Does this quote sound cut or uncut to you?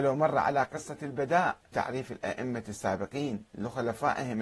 cut